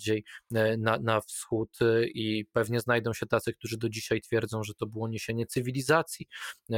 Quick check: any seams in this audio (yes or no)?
no